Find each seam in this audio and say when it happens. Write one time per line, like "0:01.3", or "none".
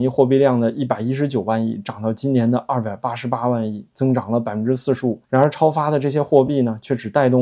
0:05.3